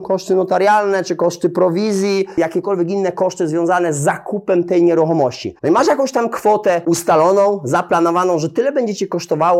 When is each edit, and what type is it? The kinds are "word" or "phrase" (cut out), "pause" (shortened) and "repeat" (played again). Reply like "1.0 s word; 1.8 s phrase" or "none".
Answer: 5.6 s pause